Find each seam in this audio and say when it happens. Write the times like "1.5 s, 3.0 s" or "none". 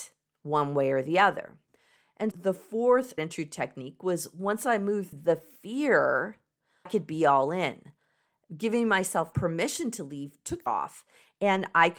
2.3 s, 3.2 s, 5.1 s, 6.9 s, 9.3 s, 10.7 s